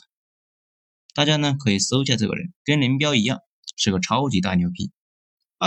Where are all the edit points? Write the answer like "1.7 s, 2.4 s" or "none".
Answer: 2.6 s